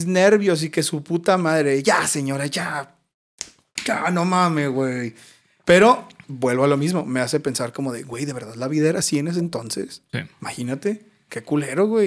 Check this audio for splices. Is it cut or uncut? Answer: uncut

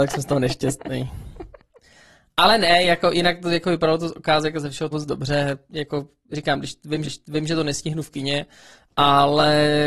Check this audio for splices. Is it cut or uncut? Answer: cut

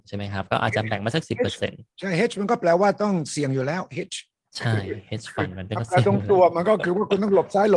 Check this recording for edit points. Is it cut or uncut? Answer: uncut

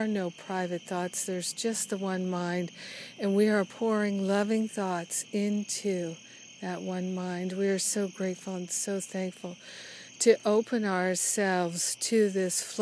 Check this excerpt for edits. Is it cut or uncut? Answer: uncut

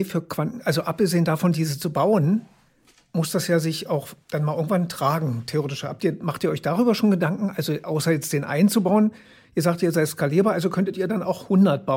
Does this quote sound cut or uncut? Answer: cut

